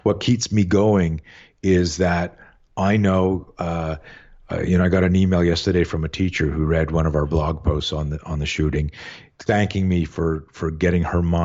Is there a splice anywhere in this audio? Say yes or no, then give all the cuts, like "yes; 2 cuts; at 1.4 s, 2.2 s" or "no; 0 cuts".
yes; 1 cut; at 9.5 s